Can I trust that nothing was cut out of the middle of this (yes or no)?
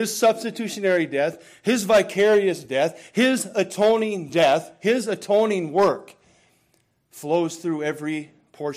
yes